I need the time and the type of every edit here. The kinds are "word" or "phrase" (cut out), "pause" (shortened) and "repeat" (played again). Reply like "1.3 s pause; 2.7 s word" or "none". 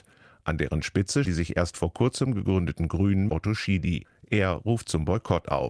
1.2 s word; 3.3 s word

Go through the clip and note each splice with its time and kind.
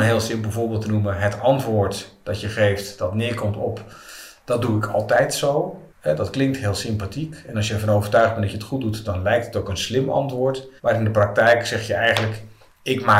5.9 s pause; 10.8 s pause

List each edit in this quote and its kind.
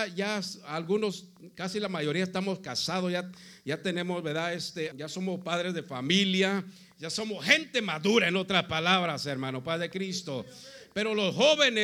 4.9 s word

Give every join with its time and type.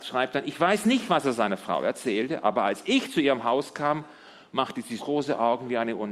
5.0 s word

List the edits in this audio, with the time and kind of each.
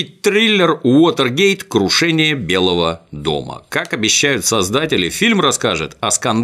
none

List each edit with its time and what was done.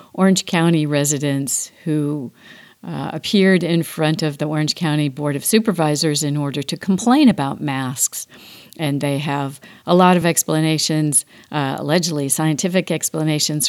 none

